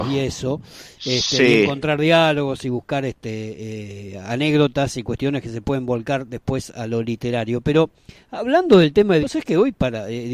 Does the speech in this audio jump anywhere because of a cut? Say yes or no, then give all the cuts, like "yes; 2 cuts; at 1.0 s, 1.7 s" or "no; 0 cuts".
yes; 1 cut; at 9.2 s